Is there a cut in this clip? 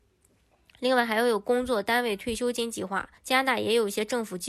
yes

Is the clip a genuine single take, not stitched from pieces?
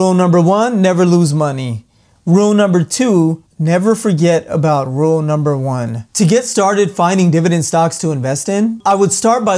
yes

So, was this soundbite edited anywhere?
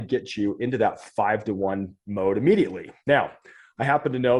yes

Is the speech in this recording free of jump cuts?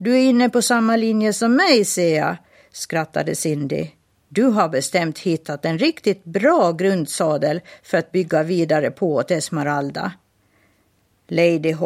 yes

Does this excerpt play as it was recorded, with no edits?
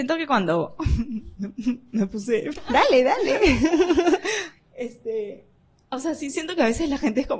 no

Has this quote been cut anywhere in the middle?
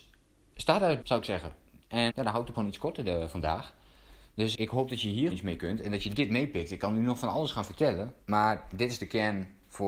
yes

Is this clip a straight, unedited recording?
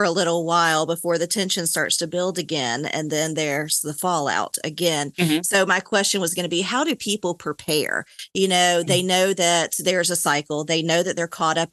yes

